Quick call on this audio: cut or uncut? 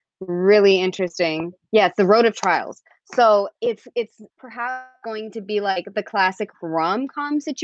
cut